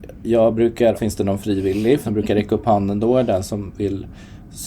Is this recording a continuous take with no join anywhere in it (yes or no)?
no